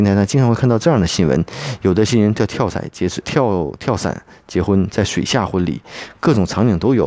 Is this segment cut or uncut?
cut